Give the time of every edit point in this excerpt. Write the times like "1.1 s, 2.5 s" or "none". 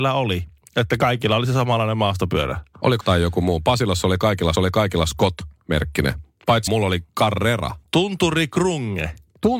3.0 s, 4.5 s, 6.7 s